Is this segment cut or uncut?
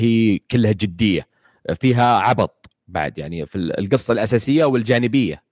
uncut